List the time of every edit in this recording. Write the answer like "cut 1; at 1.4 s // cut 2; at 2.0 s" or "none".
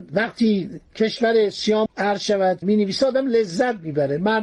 cut 1; at 1.9 s // cut 2; at 2.6 s